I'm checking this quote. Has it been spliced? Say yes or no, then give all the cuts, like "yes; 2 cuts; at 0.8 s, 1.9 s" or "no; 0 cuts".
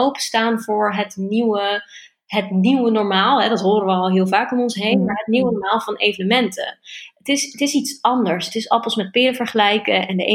no; 0 cuts